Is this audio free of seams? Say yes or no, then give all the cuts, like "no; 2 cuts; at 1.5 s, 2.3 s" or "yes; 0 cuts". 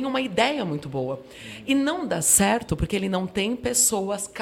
yes; 0 cuts